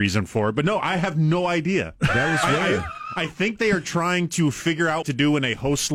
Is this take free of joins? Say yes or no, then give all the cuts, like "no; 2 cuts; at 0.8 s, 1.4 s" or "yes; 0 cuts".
no; 1 cut; at 5.0 s